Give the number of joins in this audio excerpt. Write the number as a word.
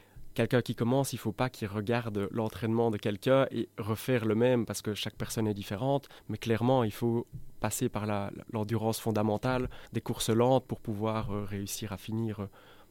two